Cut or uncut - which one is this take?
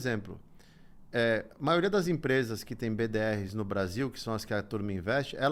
uncut